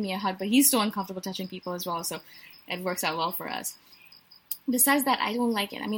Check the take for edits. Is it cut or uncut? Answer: uncut